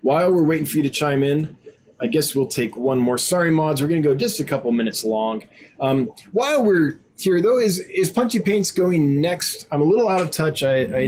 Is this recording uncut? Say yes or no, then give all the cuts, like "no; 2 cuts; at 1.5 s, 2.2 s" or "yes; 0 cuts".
yes; 0 cuts